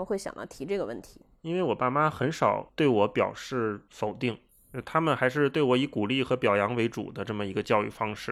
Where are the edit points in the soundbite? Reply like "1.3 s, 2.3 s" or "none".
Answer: 3.9 s